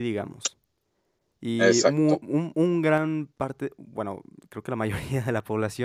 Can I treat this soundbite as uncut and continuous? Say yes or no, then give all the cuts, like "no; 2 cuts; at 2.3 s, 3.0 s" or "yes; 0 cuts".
yes; 0 cuts